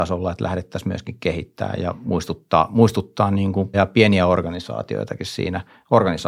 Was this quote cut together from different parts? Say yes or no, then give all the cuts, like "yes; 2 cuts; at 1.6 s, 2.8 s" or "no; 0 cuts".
yes; 2 cuts; at 1.8 s, 3.7 s